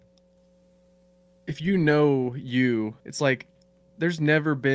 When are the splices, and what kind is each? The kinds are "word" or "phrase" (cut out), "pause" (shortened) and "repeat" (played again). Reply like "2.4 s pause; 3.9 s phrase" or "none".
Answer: 3.0 s pause

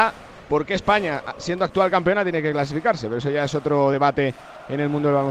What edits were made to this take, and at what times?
none

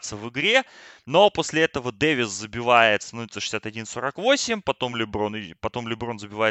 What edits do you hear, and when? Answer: none

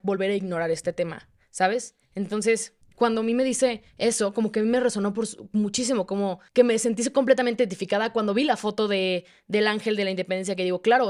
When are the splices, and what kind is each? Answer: 2.8 s pause; 3.9 s pause; 6.5 s pause

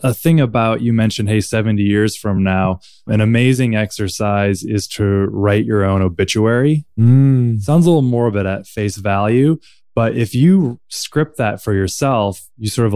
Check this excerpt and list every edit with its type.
none

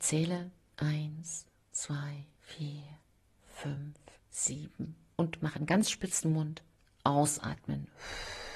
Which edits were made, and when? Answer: 2.3 s word; 4.2 s word

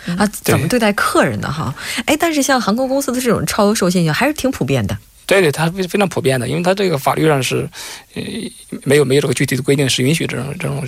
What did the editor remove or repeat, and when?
none

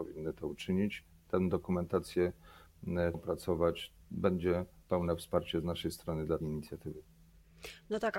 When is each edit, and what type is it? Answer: 3.1 s phrase; 6.4 s word

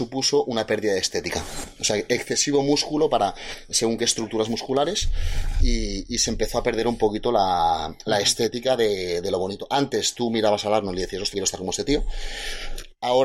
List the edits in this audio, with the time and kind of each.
11.3 s word

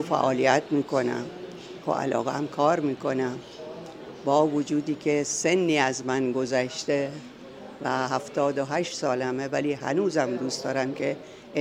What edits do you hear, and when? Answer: 1.8 s phrase

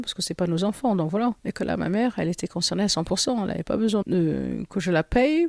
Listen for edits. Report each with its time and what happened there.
1.4 s pause; 4.0 s word

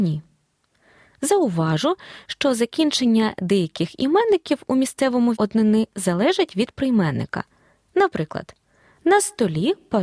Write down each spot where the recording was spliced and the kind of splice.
5.4 s word

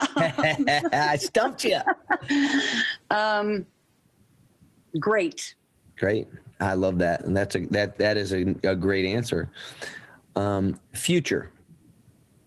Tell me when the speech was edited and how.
none

